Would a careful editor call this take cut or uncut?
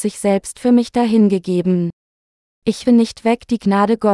cut